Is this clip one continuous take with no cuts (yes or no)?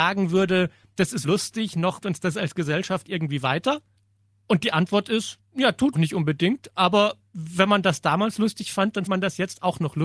no